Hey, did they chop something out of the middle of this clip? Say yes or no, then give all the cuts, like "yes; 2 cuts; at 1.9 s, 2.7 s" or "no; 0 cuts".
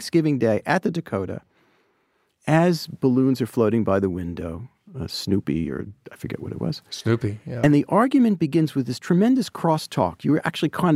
no; 0 cuts